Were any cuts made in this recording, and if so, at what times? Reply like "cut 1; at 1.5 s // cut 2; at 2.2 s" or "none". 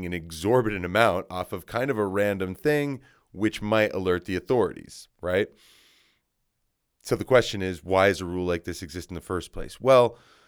none